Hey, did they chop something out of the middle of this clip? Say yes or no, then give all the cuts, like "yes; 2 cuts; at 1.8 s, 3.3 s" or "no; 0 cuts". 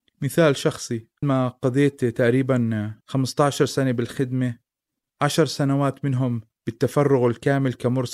yes; 2 cuts; at 1.2 s, 3.0 s